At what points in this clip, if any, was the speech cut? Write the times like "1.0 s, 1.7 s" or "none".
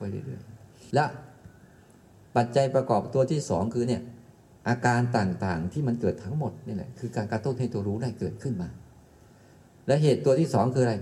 0.9 s